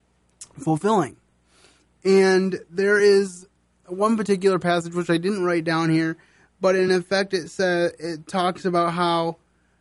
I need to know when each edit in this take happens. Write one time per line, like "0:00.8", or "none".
none